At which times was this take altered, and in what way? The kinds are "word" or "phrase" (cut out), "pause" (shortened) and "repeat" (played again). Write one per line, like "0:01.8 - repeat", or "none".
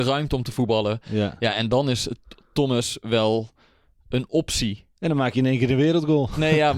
none